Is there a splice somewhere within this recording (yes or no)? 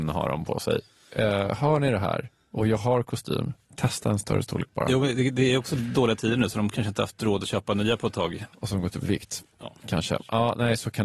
yes